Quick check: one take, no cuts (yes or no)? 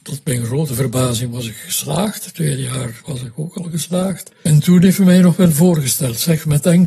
no